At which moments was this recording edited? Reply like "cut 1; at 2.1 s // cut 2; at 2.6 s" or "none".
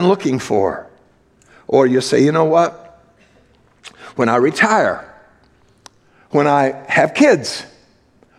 none